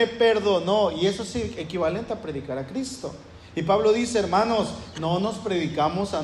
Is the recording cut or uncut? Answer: uncut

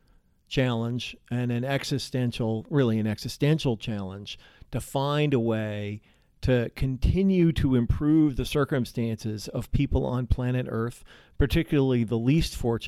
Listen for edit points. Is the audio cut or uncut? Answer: uncut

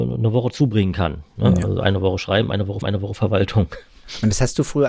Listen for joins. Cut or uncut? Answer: cut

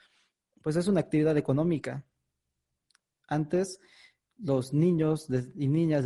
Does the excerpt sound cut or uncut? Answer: uncut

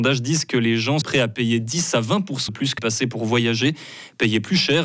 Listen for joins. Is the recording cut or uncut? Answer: cut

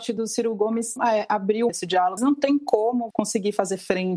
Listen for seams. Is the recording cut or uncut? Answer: cut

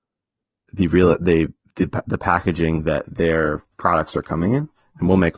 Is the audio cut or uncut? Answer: uncut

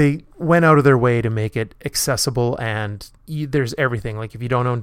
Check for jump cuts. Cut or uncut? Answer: cut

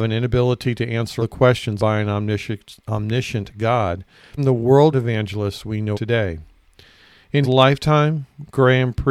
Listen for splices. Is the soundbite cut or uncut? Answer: cut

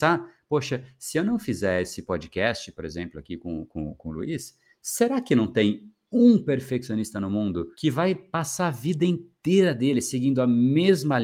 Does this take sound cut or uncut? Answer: cut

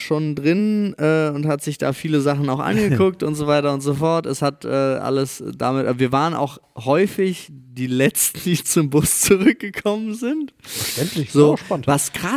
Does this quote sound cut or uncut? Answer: uncut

